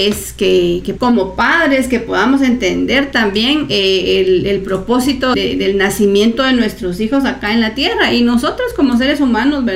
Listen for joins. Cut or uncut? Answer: cut